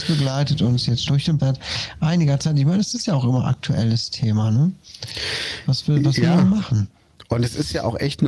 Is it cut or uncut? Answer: cut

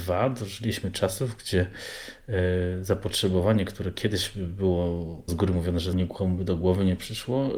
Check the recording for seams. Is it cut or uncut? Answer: cut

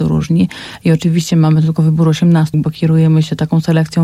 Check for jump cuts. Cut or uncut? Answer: cut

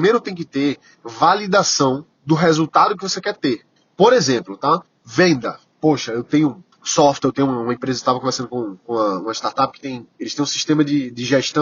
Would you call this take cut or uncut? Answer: cut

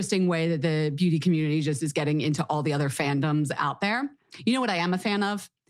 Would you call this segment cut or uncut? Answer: uncut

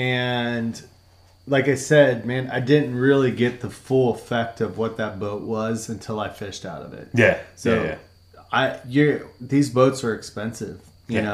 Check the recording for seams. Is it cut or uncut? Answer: uncut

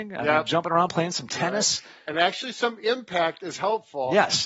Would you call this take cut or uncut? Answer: uncut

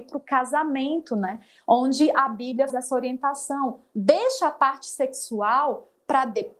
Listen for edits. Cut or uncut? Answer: cut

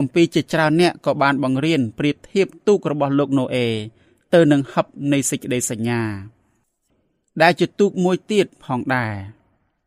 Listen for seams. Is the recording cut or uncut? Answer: uncut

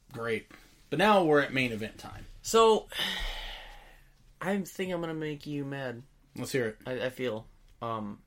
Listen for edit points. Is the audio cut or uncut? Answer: uncut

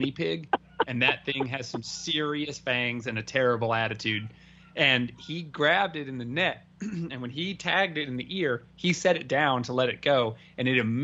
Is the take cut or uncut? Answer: uncut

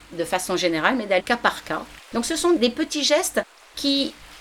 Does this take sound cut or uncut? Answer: cut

